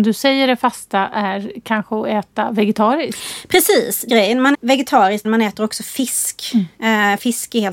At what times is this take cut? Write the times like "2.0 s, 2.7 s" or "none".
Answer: 4.1 s, 4.5 s, 5.2 s